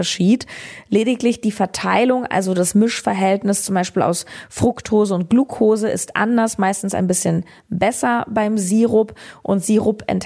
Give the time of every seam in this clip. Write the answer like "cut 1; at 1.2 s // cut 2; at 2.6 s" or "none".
none